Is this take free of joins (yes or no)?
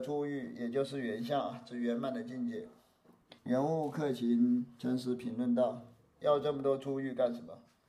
no